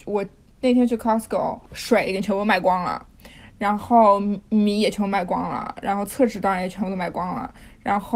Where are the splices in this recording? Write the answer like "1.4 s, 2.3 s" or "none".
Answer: 1.7 s